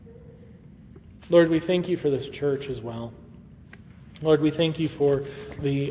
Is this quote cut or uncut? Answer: uncut